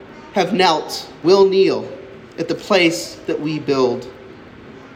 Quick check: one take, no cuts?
no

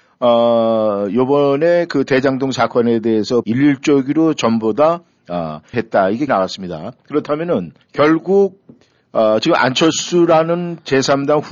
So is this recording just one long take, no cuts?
no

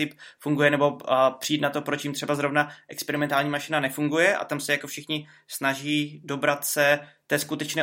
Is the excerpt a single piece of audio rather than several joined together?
yes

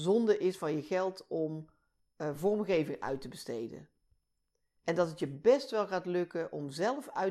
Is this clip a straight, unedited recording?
yes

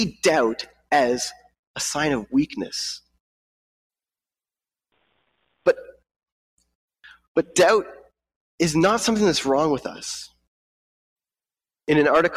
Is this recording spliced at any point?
no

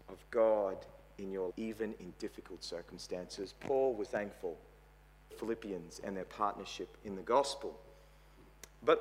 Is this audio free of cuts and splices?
no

